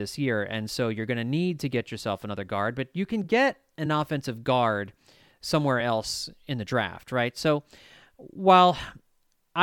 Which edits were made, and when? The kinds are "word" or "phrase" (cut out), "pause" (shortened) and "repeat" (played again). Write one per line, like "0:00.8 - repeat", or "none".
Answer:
none